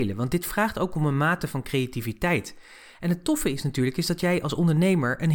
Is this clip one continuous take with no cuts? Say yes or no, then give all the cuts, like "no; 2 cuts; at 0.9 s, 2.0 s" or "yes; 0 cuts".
yes; 0 cuts